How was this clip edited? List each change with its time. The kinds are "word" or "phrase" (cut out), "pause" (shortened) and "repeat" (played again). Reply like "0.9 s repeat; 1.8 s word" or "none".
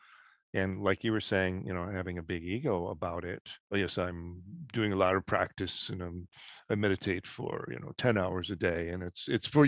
3.6 s pause